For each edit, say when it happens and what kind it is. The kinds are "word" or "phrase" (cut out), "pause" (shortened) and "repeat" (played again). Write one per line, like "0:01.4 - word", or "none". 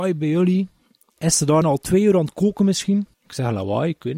0:01.6 - word
0:03.1 - pause